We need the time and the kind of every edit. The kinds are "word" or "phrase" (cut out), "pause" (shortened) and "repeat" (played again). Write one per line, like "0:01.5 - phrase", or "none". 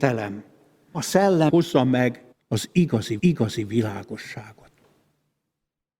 0:00.9 - word
0:01.5 - word
0:02.3 - pause
0:03.2 - repeat